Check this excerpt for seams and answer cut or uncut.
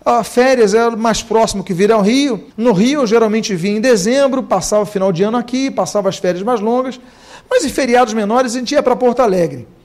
cut